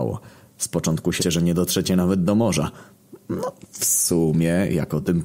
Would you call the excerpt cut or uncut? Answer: cut